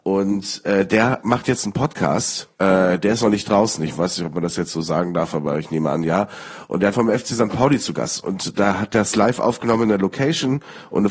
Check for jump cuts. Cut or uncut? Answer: cut